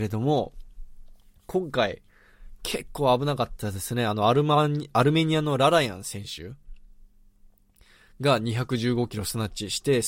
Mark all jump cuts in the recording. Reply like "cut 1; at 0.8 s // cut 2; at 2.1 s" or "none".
none